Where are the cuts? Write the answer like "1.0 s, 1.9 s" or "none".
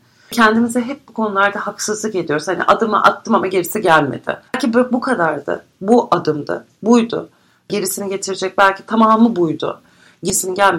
4.5 s